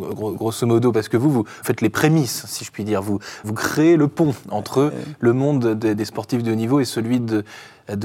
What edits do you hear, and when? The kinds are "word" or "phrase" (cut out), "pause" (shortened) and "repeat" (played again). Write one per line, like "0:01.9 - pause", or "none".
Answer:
0:01.6 - word
0:03.4 - word